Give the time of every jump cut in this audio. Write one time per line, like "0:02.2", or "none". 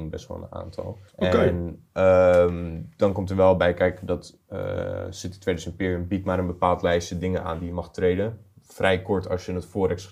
0:01.1